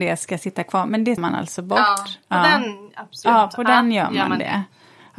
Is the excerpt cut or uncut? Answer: cut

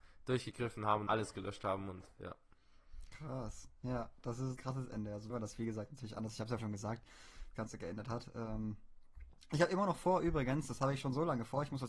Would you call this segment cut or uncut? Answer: cut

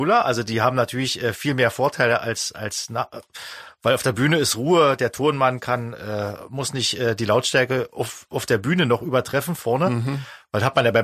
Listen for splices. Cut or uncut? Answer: uncut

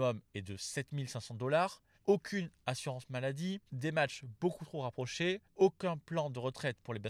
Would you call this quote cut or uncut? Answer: cut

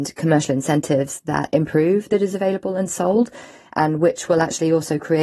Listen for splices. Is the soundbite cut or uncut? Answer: cut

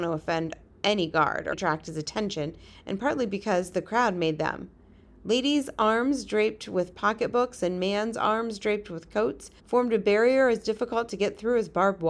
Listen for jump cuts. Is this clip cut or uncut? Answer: cut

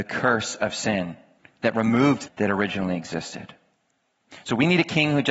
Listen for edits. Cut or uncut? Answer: cut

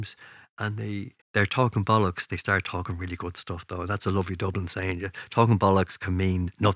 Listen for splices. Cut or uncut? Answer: cut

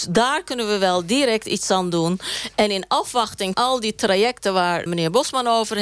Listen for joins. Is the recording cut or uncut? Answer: cut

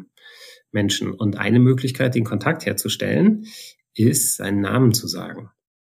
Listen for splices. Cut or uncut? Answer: uncut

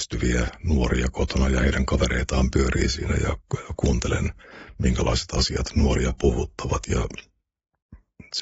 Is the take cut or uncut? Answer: uncut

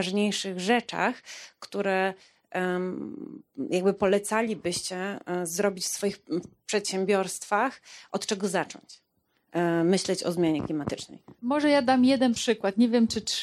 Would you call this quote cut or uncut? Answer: uncut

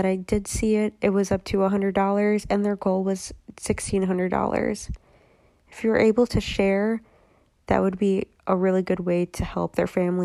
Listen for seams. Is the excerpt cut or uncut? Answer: uncut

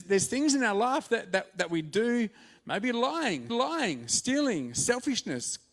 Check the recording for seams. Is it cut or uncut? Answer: cut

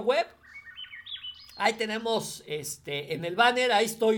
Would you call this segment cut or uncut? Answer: uncut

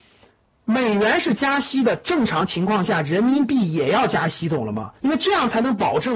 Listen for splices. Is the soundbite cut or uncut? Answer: cut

